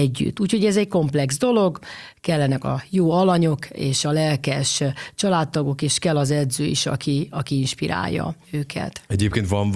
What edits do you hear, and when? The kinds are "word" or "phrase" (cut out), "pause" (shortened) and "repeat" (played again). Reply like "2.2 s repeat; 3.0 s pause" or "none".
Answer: 8.4 s pause